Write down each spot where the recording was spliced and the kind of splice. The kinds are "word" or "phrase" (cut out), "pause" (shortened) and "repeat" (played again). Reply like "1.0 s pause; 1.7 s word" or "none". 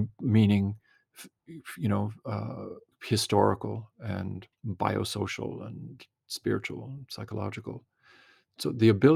2.9 s pause; 4.5 s pause